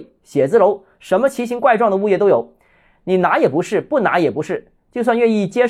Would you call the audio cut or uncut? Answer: uncut